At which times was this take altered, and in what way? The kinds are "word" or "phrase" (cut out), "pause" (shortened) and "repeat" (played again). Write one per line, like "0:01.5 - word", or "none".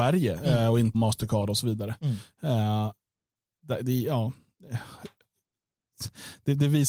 0:00.9 - phrase